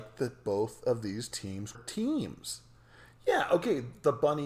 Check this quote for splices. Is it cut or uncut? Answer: cut